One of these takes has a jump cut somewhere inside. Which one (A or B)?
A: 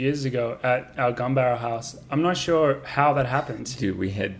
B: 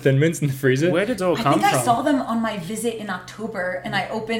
B